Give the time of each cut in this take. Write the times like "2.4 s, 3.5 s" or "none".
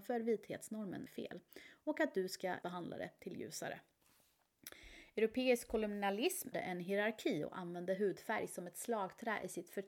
1.1 s, 2.6 s, 6.5 s